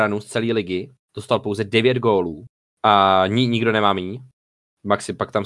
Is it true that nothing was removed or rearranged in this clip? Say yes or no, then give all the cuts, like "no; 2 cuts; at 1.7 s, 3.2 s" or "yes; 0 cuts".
no; 1 cut; at 2.6 s